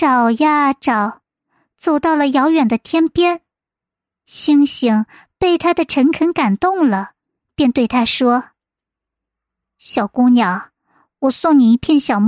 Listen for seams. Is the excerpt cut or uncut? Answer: uncut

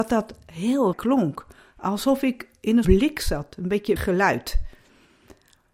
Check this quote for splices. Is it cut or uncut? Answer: cut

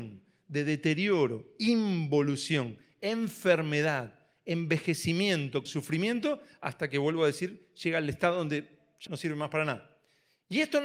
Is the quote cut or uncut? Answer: cut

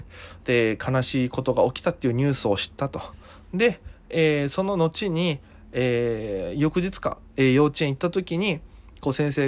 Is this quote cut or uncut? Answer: uncut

